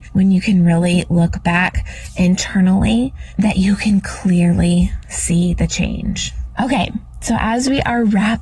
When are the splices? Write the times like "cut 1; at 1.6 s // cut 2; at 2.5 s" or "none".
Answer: none